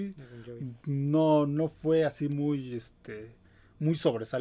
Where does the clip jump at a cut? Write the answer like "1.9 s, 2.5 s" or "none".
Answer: none